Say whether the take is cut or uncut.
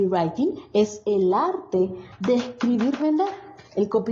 cut